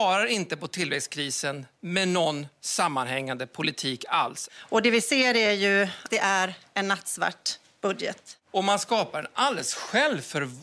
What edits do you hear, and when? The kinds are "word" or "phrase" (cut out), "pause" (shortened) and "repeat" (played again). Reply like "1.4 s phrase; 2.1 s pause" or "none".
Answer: 6.1 s word